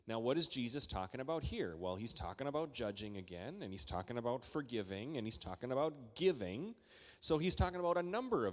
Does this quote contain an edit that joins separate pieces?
no; 0 cuts

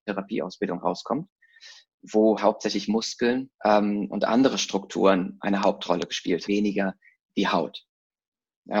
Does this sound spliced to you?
yes; 3 cuts; at 2.4 s, 3.5 s, 6.5 s

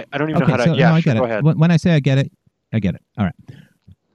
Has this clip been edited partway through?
no; 0 cuts

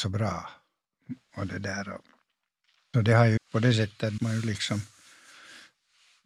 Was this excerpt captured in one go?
no; 3 cuts; at 2.9 s, 3.4 s, 4.2 s

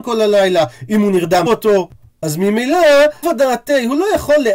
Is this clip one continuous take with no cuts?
no; 2 cuts; at 1.5 s, 3.2 s

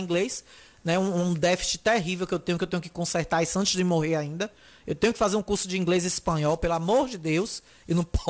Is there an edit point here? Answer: no; 0 cuts

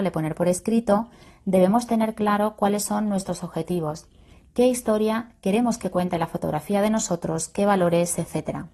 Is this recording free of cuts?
yes; 0 cuts

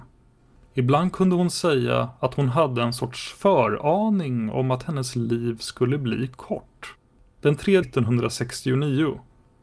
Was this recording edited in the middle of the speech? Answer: yes; 1 cut; at 7.8 s

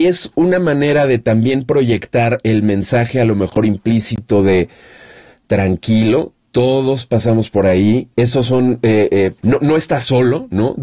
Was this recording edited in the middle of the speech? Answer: yes; 3 cuts; at 6.4 s, 8.1 s, 9.4 s

